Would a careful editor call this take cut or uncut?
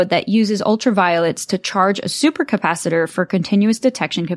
uncut